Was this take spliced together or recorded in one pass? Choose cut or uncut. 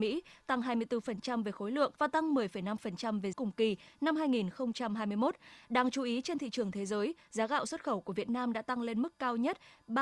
cut